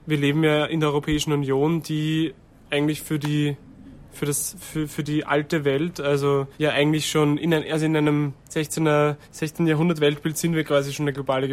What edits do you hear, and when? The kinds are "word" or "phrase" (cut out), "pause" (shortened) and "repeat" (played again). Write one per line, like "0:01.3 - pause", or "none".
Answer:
0:06.5 - pause
0:09.2 - pause